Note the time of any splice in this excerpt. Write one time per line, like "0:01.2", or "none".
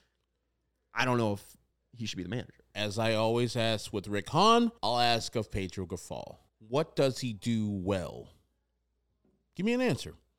0:04.8
0:06.5